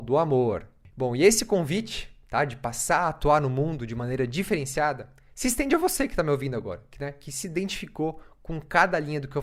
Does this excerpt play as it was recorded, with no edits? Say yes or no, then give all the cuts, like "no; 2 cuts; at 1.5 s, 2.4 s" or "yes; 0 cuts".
yes; 0 cuts